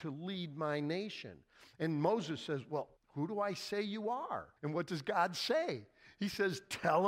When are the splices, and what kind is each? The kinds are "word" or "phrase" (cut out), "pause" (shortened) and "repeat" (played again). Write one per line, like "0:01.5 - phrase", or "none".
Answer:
0:03.0 - pause
0:04.6 - pause